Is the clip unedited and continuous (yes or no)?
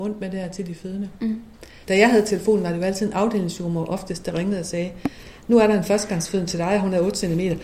no